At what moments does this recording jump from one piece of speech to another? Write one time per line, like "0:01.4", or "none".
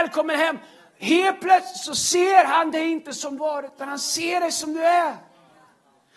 0:03.4